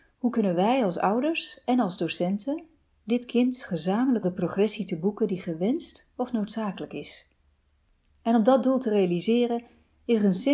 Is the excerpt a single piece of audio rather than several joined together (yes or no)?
no